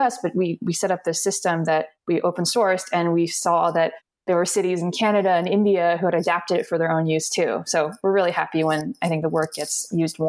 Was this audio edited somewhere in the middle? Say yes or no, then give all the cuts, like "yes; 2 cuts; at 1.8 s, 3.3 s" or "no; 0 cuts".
no; 0 cuts